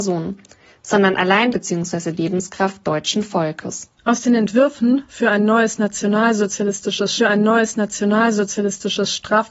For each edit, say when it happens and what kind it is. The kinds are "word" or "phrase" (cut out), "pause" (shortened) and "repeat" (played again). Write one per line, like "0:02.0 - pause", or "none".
0:01.5 - phrase
0:02.8 - word
0:04.0 - pause
0:07.2 - repeat